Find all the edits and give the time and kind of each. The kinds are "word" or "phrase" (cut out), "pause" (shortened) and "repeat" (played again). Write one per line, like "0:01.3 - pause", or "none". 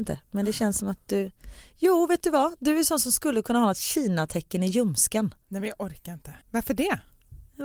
0:05.4 - pause
0:06.4 - pause